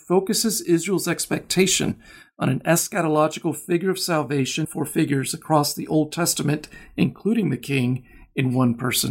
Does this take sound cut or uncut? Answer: cut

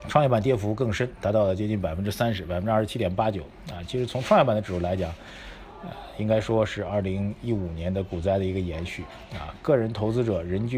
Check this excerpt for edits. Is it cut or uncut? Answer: uncut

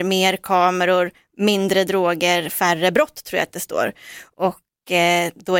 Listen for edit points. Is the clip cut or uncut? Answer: uncut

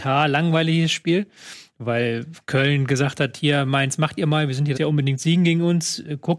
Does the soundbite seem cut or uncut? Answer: cut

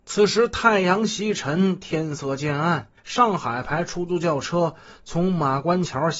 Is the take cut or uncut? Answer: cut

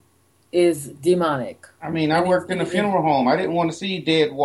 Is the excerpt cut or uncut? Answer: uncut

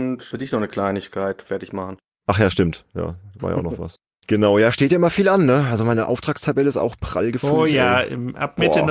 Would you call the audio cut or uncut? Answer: uncut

